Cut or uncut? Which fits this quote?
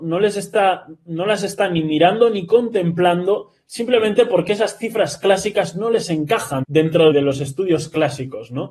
cut